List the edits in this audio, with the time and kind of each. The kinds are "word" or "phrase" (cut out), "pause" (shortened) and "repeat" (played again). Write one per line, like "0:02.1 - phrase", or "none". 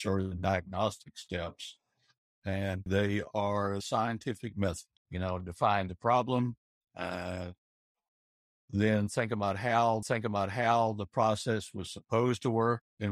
0:02.9 - word
0:03.8 - word
0:05.0 - pause
0:10.0 - repeat